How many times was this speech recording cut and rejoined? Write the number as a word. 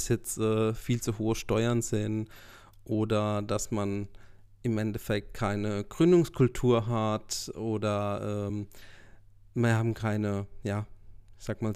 zero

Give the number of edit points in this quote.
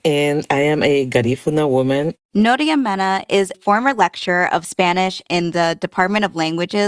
one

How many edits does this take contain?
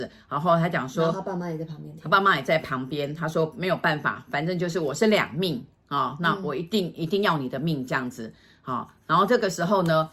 zero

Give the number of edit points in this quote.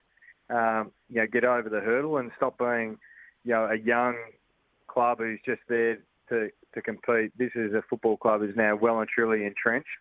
zero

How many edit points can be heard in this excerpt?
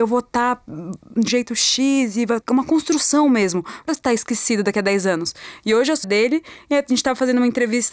four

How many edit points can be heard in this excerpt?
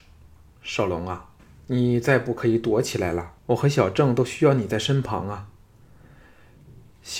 two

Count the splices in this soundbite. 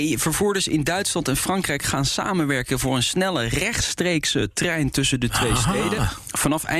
zero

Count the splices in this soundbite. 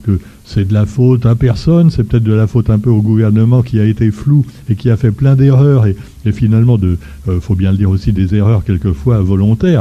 zero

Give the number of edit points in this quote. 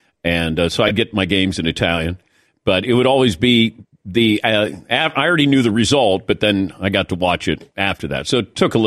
zero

